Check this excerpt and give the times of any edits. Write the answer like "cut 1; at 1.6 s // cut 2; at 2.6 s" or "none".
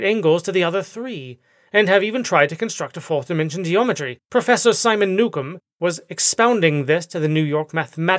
cut 1; at 4.2 s